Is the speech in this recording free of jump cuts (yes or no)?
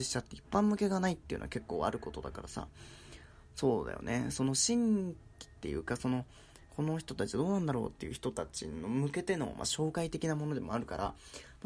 yes